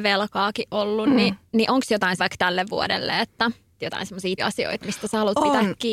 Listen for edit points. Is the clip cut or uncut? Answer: cut